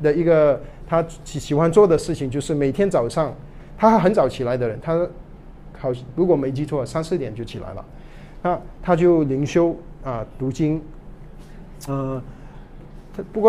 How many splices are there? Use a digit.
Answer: 1